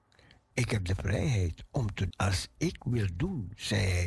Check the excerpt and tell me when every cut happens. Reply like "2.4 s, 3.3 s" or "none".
2.1 s